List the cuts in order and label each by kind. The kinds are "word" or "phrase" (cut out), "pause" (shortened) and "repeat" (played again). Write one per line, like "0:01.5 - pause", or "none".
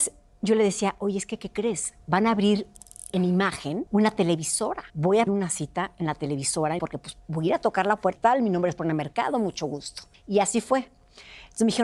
0:03.1 - word
0:03.9 - pause
0:04.9 - pause
0:05.3 - word
0:06.8 - word
0:08.2 - phrase
0:10.1 - pause